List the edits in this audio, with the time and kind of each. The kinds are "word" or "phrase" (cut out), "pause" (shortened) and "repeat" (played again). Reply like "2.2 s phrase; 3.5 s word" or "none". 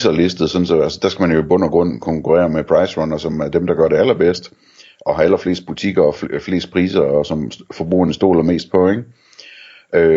none